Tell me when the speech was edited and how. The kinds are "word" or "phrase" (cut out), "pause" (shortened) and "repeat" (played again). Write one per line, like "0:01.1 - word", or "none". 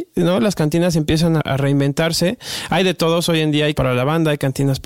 0:01.4 - word
0:03.7 - word